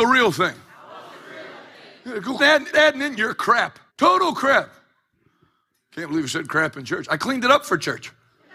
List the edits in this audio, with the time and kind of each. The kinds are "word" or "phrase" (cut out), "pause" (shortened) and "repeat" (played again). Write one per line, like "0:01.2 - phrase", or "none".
0:02.4 - word
0:02.7 - word
0:03.9 - pause

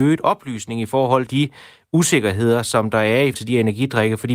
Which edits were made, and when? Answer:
0:01.3 - word
0:03.3 - word

